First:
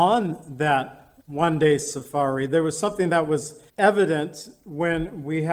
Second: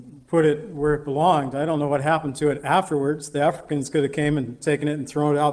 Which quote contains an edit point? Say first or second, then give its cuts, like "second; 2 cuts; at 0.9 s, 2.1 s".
first; 2 cuts; at 1.2 s, 3.7 s